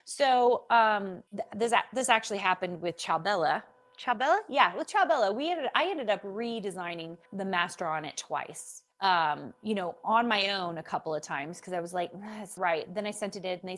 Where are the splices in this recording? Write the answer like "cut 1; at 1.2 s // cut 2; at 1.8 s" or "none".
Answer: cut 1; at 1.3 s // cut 2; at 7.3 s // cut 3; at 8.9 s // cut 4; at 12.6 s